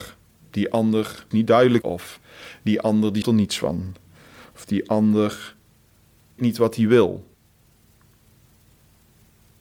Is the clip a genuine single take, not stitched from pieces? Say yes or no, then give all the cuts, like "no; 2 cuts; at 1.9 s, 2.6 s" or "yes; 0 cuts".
no; 4 cuts; at 1.3 s, 1.8 s, 3.2 s, 6.4 s